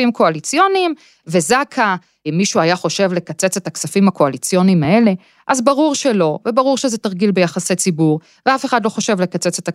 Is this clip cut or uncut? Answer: uncut